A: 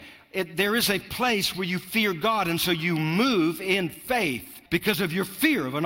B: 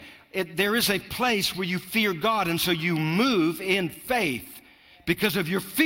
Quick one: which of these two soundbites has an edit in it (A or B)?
A